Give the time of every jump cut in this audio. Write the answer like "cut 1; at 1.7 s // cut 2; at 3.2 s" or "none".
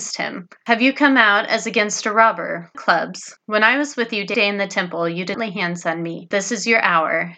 cut 1; at 2.7 s // cut 2; at 3.4 s // cut 3; at 4.3 s // cut 4; at 5.3 s // cut 5; at 6.3 s